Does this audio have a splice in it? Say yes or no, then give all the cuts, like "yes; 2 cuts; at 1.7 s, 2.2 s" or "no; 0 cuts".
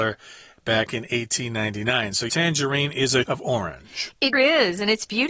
yes; 3 cuts; at 2.3 s, 3.2 s, 4.3 s